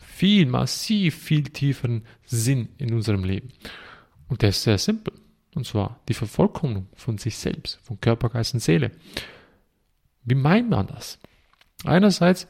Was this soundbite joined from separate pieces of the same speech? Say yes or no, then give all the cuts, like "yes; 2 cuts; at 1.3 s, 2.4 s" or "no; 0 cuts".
no; 0 cuts